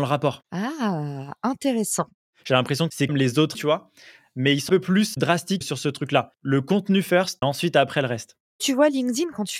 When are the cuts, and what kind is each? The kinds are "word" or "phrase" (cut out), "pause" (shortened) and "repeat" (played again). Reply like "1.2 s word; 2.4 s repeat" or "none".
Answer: 3.1 s word; 3.5 s word; 4.7 s word; 7.4 s word